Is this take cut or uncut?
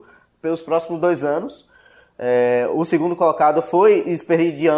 uncut